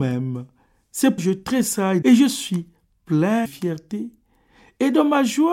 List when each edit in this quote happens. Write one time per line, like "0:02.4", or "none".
0:01.2
0:02.0
0:03.4